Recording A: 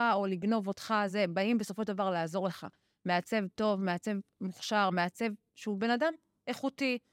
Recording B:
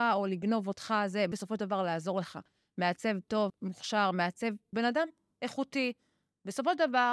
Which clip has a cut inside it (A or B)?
B